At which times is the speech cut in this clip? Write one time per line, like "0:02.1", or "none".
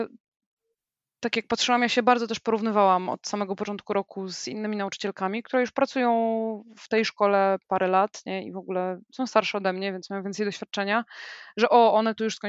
0:09.0